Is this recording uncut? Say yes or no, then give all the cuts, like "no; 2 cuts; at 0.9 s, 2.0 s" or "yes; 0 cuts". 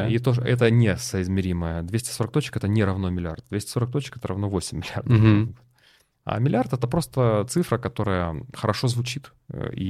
yes; 0 cuts